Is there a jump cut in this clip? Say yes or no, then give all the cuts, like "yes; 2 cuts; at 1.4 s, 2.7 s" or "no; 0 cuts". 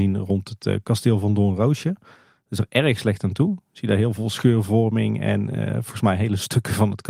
no; 0 cuts